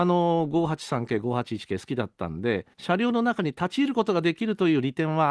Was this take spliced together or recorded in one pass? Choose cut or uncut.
cut